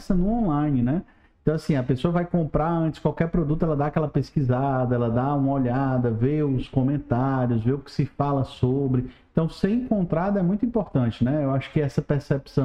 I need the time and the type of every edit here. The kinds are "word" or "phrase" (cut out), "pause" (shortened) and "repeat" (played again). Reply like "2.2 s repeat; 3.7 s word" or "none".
none